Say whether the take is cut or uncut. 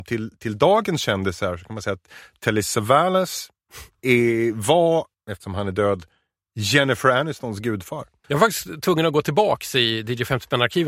cut